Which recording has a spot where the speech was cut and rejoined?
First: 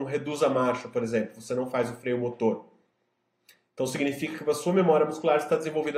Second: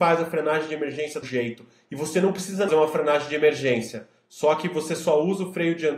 second; 2 cuts; at 1.2 s, 2.7 s

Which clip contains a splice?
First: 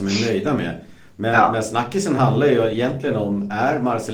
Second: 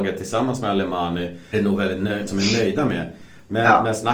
second; 2 cuts; at 1.5 s, 2.3 s

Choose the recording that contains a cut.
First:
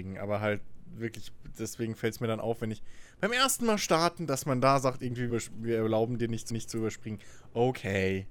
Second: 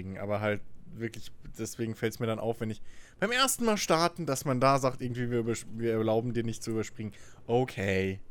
first; 2 cuts; at 5.3 s, 6.5 s

